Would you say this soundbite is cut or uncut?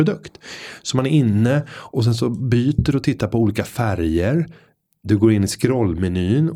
uncut